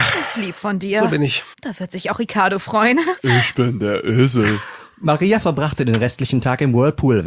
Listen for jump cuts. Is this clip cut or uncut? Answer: cut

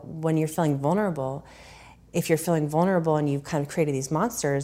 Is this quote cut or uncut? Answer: uncut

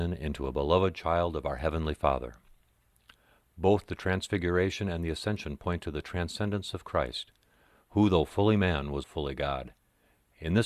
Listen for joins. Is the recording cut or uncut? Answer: cut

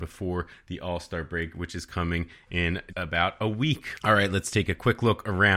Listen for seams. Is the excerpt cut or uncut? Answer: cut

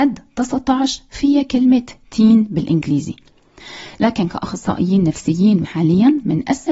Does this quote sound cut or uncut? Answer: cut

